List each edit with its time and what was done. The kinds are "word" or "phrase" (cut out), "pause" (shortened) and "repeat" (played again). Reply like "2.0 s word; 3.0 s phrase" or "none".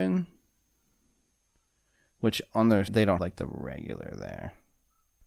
2.9 s word; 3.2 s word